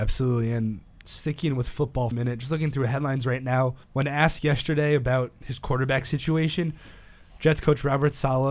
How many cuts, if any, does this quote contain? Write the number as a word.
two